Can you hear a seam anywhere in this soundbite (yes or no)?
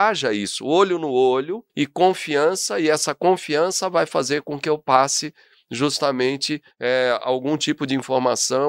yes